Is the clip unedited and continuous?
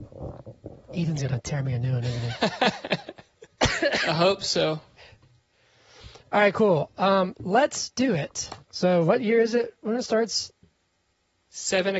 no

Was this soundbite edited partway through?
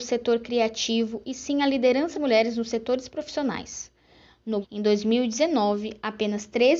yes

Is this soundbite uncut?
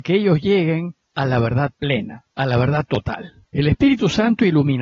no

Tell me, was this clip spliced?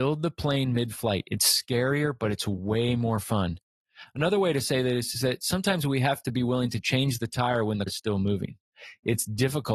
yes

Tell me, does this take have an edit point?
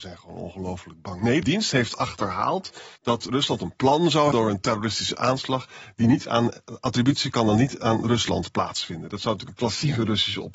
yes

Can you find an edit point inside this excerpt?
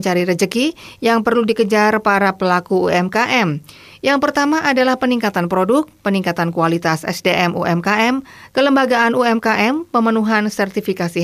no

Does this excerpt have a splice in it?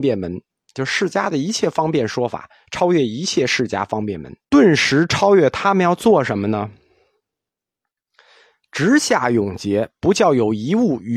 yes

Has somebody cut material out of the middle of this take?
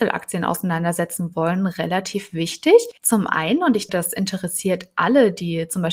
yes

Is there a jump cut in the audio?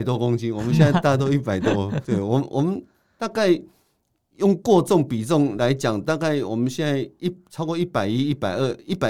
yes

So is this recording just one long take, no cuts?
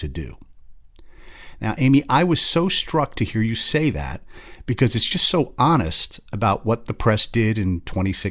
yes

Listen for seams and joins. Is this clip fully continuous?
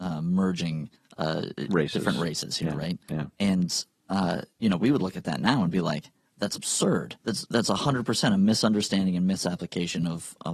no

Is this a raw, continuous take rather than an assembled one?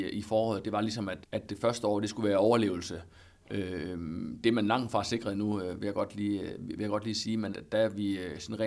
no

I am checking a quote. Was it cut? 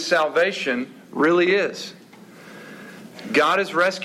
no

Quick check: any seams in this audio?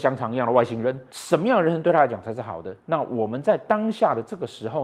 yes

